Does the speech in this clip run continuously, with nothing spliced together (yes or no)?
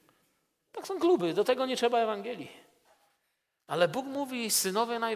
yes